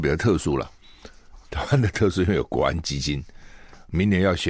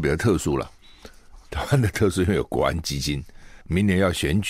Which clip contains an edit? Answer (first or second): second